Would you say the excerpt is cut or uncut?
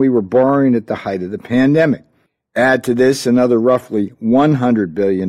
cut